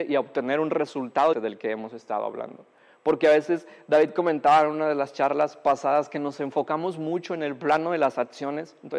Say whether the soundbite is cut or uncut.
cut